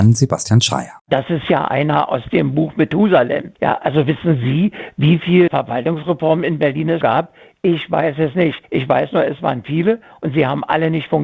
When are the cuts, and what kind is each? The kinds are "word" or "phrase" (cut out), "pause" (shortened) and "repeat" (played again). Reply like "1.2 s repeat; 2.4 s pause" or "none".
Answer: 1.0 s pause; 3.5 s pause; 5.5 s word; 7.0 s word; 8.6 s pause